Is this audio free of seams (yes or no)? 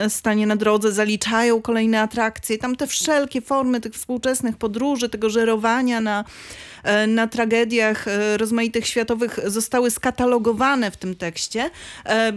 yes